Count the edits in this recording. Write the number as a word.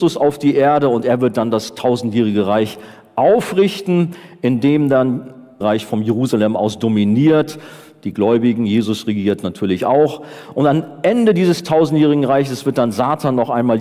one